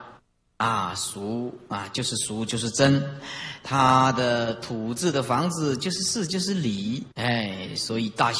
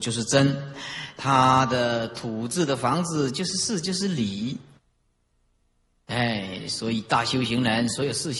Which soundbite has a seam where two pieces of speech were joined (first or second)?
first